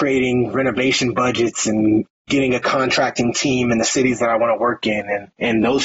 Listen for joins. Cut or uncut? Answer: uncut